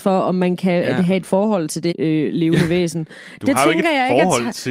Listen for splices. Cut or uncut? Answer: cut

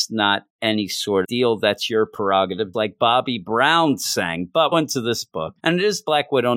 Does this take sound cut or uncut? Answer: cut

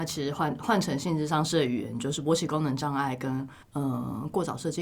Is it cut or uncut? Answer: cut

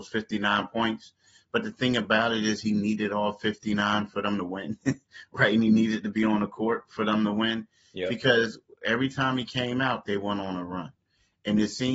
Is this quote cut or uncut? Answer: uncut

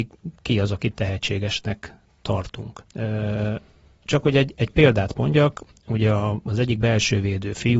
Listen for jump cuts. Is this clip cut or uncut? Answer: cut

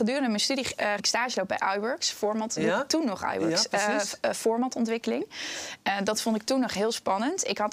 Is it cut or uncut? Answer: cut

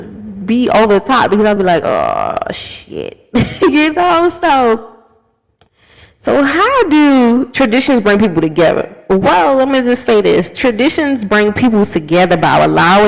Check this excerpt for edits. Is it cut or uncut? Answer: uncut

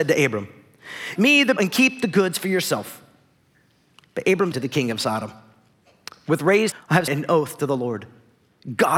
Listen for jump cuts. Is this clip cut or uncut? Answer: cut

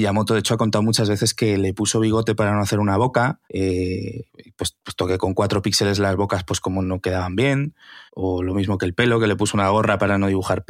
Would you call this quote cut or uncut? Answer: cut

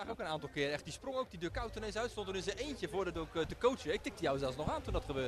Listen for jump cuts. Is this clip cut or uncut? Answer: cut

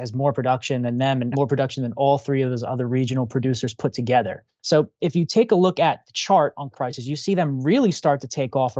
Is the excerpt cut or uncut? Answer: cut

